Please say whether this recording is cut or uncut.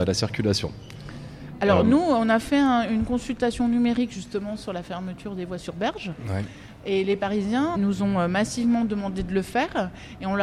cut